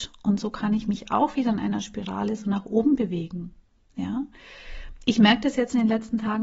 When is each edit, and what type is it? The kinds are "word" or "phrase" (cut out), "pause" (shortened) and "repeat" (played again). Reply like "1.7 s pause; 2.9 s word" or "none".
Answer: none